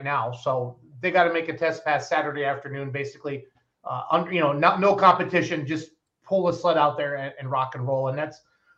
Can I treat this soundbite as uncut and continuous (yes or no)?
yes